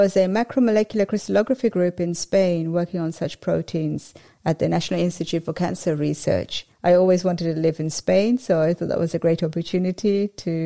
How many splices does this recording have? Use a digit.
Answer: 1